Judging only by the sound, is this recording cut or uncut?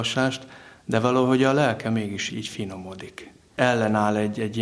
cut